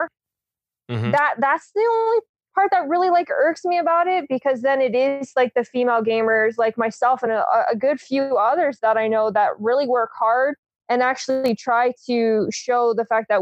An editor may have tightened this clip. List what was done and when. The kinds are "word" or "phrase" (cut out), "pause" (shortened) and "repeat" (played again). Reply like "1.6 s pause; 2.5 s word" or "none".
none